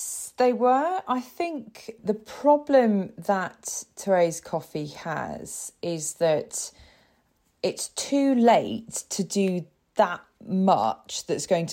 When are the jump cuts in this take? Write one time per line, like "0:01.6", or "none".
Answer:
none